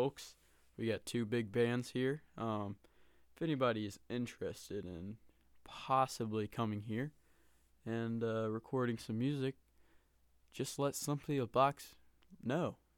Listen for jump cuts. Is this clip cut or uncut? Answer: uncut